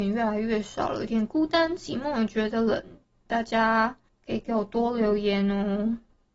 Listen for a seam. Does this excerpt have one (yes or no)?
yes